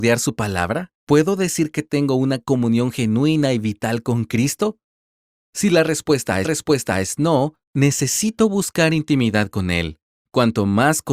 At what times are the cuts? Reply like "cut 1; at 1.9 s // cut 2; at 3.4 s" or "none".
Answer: cut 1; at 1.0 s // cut 2; at 6.4 s // cut 3; at 7.6 s